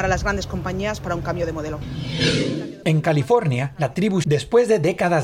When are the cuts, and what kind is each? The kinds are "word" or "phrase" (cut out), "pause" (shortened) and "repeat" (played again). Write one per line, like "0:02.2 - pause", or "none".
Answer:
0:04.2 - word